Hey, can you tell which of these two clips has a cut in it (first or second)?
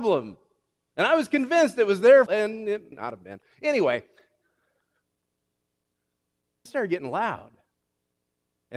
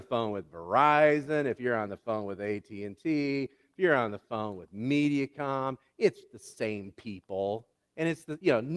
first